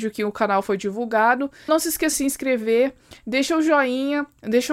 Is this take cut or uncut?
cut